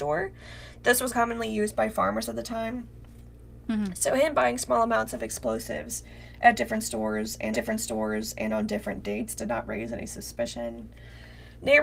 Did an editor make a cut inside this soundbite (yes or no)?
yes